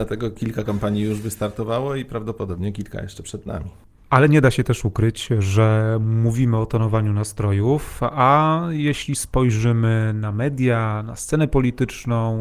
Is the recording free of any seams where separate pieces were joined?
yes; 0 cuts

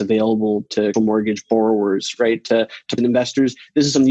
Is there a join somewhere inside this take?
yes; 2 cuts; at 0.9 s, 3.0 s

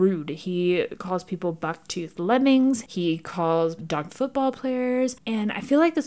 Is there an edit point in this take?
yes; 2 cuts; at 3.8 s, 4.1 s

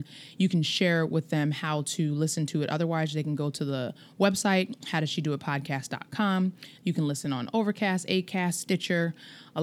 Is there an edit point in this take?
no; 0 cuts

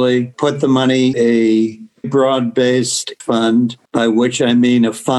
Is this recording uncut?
no; 4 cuts; at 1.1 s, 2.0 s, 3.2 s, 3.9 s

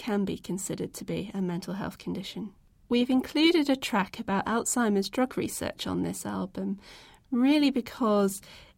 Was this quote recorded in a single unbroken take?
yes; 0 cuts

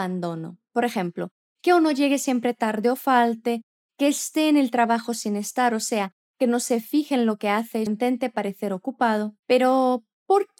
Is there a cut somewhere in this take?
yes; 1 cut; at 7.9 s

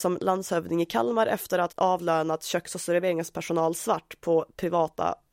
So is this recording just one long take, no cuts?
no; 1 cut; at 1.7 s

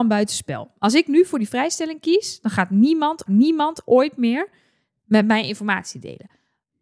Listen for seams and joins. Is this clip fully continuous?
no; 1 cut; at 3.3 s

